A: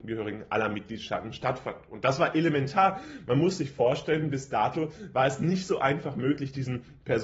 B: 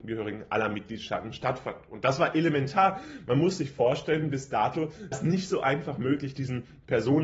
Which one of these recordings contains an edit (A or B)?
B